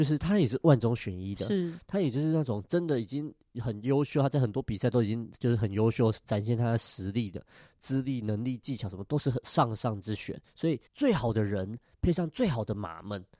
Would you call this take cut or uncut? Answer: cut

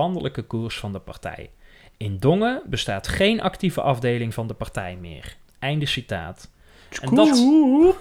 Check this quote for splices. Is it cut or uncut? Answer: uncut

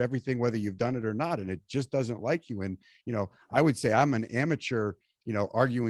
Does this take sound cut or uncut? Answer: uncut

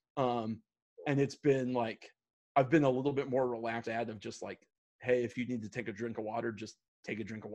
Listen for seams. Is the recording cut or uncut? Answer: cut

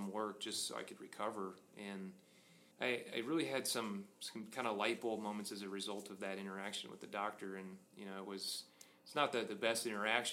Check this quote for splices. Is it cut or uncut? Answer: cut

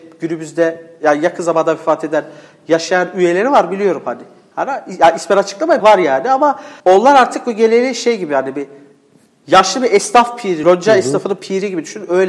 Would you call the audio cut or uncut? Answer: cut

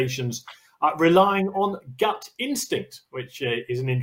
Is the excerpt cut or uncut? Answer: uncut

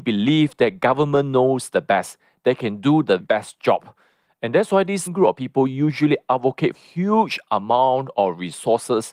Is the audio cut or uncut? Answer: cut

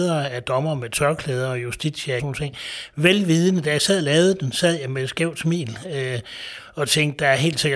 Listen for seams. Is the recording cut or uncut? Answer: cut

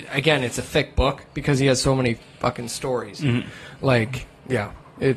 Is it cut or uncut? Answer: uncut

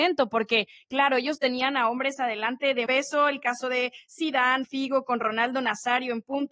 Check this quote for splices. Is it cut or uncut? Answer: cut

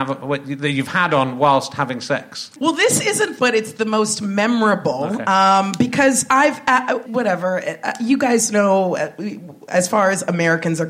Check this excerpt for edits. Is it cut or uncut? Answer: cut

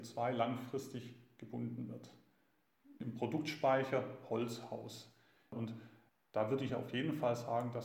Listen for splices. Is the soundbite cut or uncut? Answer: uncut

